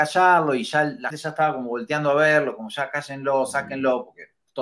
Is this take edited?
yes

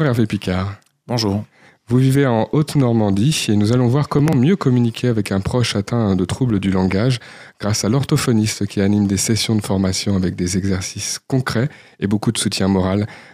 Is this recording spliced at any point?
no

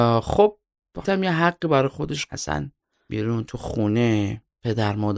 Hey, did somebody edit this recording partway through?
yes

